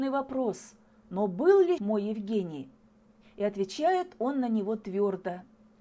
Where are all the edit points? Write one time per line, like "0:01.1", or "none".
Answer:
0:01.8